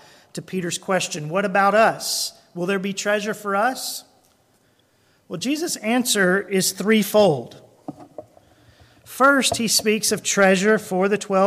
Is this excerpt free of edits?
yes; 0 cuts

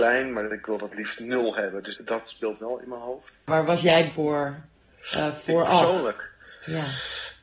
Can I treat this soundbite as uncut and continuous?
no; 2 cuts; at 2.0 s, 4.1 s

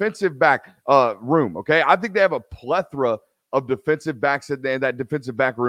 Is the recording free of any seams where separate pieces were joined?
yes; 0 cuts

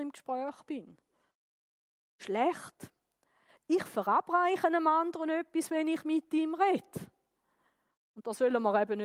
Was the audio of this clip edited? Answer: no; 0 cuts

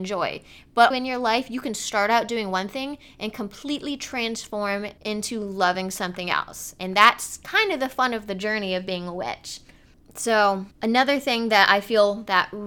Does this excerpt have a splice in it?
yes; 3 cuts; at 0.9 s, 5.0 s, 10.7 s

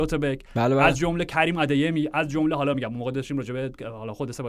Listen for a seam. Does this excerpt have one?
no; 0 cuts

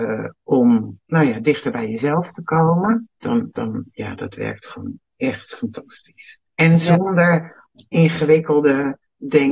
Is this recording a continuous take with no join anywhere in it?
no; 2 cuts; at 3.2 s, 6.5 s

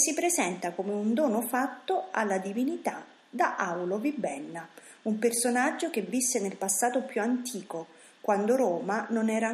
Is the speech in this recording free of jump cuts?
yes; 0 cuts

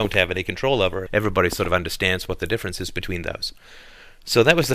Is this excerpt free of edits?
no; 1 cut; at 1.1 s

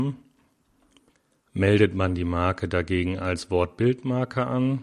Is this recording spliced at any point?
no; 0 cuts

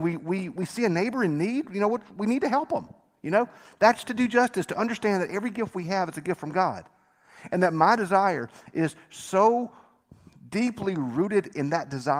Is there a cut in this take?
no; 0 cuts

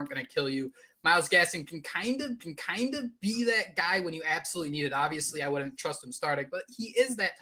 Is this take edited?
yes; 1 cut; at 2.4 s

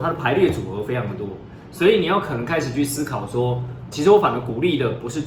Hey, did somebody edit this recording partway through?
yes; 1 cut; at 3.9 s

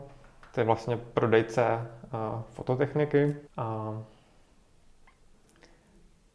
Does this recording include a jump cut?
yes; 1 cut; at 3.5 s

